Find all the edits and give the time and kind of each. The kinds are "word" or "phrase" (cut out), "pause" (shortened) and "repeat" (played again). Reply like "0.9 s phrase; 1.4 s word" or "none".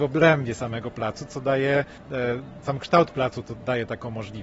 2.6 s word